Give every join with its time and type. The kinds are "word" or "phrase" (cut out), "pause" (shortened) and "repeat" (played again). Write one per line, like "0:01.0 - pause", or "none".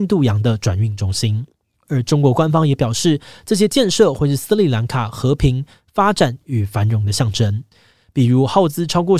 none